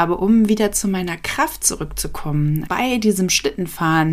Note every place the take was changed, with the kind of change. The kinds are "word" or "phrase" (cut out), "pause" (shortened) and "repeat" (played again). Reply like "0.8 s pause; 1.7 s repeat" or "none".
2.7 s word